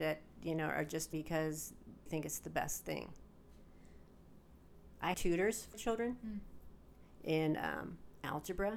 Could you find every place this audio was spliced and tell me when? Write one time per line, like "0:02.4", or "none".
0:01.1
0:02.1
0:05.1
0:05.7

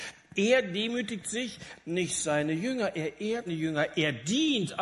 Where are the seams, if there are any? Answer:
0:03.5

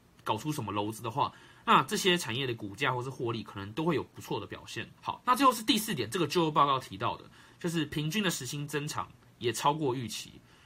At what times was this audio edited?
0:05.0

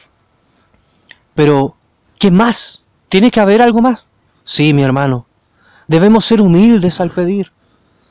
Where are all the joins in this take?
0:02.9

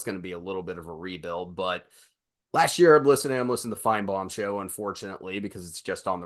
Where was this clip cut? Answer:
none

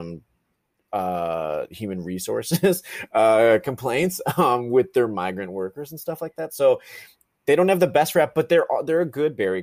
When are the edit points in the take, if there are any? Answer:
none

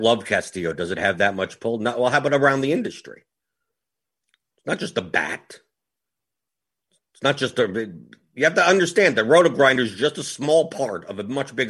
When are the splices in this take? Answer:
none

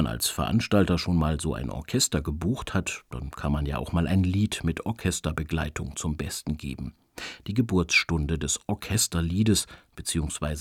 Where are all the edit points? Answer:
none

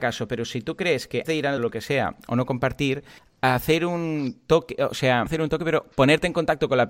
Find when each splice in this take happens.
0:01.2
0:01.6
0:05.3

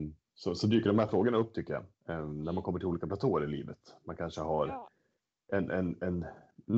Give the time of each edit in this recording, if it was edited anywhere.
none

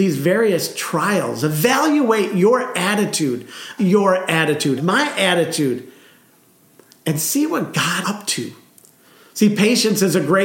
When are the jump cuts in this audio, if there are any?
0:03.8
0:04.8
0:08.0

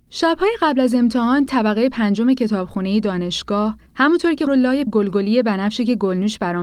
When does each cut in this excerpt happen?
0:01.5
0:03.9
0:04.5
0:04.9

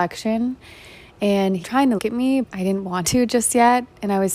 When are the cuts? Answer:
0:01.6
0:02.0
0:02.4
0:03.0

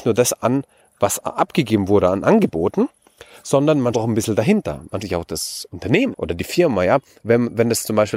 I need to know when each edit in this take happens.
0:03.9
0:05.0
0:06.1

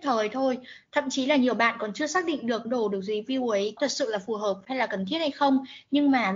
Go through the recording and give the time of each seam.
0:02.6
0:03.8

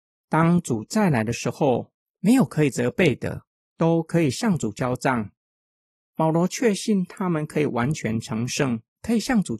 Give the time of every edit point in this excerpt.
none

